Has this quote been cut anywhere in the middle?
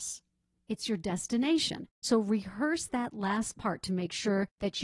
yes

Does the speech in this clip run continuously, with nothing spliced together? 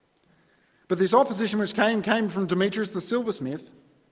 yes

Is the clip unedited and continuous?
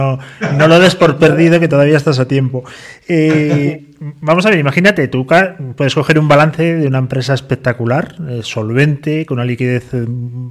yes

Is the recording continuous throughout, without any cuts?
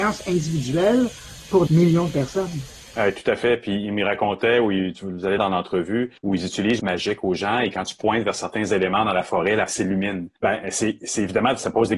no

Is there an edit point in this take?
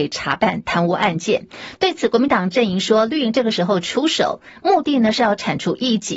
no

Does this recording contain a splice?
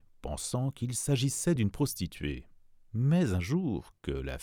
no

